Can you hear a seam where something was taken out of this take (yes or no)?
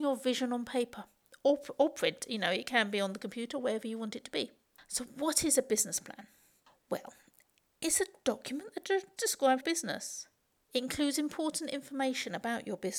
yes